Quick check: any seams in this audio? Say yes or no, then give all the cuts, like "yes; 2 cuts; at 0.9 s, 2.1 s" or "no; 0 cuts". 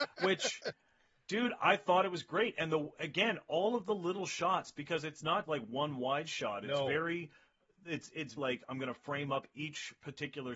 yes; 2 cuts; at 5.4 s, 8.4 s